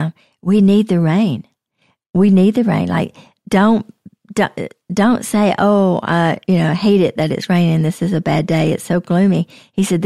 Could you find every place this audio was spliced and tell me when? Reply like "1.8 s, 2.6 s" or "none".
none